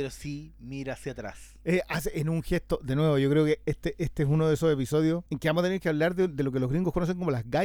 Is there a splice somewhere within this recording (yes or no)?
yes